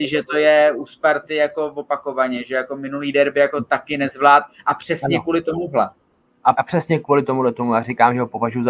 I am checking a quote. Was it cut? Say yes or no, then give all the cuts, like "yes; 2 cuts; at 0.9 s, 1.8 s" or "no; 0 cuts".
yes; 1 cut; at 6.5 s